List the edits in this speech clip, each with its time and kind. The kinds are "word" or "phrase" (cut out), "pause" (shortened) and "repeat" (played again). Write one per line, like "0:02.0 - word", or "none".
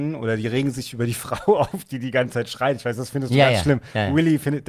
none